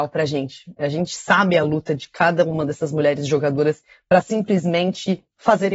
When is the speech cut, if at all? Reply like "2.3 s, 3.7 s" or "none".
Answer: none